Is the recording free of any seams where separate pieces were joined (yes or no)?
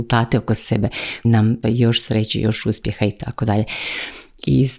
no